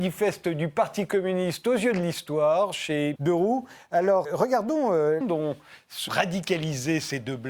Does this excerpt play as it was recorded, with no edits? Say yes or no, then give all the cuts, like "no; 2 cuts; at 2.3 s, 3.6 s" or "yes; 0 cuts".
no; 4 cuts; at 3.2 s, 4.2 s, 5.2 s, 6.1 s